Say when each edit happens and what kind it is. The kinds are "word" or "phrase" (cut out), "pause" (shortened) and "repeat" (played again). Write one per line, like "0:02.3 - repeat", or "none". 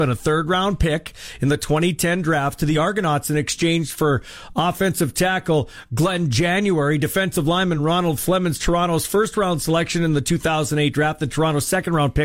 none